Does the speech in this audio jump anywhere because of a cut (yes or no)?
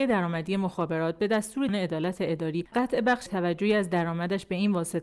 yes